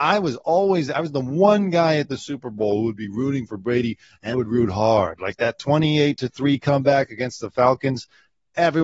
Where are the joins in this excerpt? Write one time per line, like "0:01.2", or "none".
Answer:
0:04.3